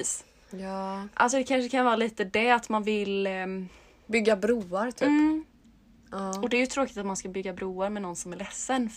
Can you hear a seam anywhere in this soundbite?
no; 0 cuts

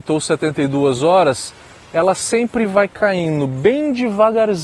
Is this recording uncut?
yes; 0 cuts

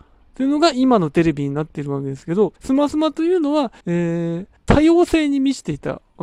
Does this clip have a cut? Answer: yes; 3 cuts; at 2.6 s, 3.8 s, 4.6 s

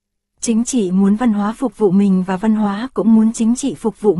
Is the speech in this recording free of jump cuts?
yes; 0 cuts

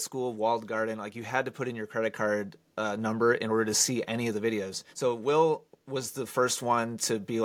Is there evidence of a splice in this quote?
yes; 1 cut; at 4.9 s

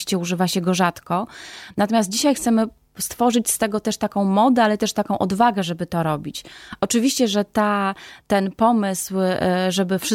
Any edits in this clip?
no; 0 cuts

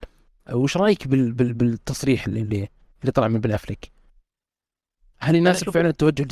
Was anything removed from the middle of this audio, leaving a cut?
no; 0 cuts

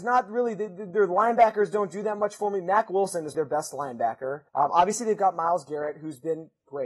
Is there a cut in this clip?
yes; 2 cuts; at 3.3 s, 4.5 s

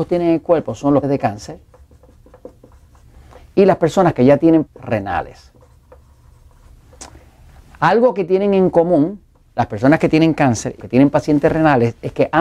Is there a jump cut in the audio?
yes; 3 cuts; at 1.0 s, 4.7 s, 10.8 s

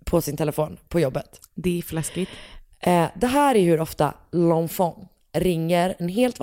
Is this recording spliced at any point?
no; 0 cuts

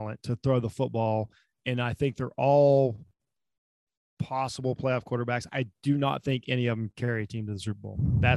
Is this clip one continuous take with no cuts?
yes; 0 cuts

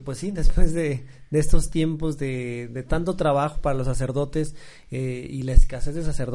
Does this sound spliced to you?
no; 0 cuts

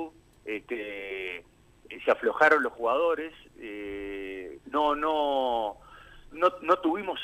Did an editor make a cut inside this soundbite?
yes; 2 cuts; at 4.6 s, 6.3 s

